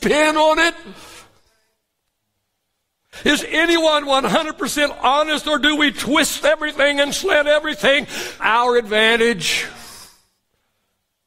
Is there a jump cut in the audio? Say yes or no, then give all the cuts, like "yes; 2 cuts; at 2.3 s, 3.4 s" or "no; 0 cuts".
yes; 1 cut; at 8.4 s